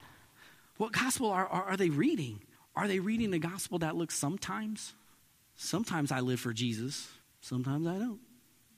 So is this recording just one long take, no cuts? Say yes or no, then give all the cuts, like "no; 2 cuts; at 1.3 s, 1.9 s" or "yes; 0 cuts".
no; 3 cuts; at 2.6 s, 5.2 s, 7.2 s